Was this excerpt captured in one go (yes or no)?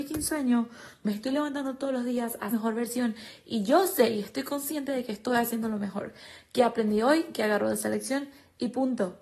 no